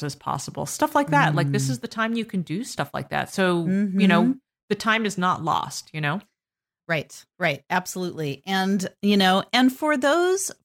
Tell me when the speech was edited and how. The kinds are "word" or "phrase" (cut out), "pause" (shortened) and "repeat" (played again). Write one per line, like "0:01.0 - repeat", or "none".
none